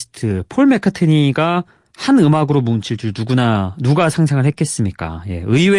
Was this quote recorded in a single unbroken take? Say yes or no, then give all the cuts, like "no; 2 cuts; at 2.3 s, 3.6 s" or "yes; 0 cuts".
yes; 0 cuts